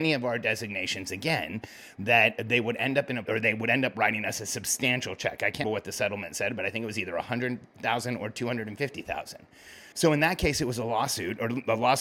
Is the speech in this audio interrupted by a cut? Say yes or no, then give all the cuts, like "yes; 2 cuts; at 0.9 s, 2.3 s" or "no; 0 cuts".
yes; 3 cuts; at 3.3 s, 5.6 s, 9.9 s